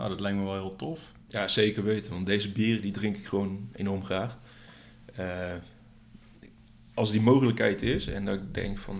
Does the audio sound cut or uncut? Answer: uncut